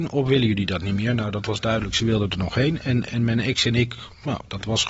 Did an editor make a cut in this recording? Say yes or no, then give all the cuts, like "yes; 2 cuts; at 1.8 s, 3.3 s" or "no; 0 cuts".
yes; 1 cut; at 3.1 s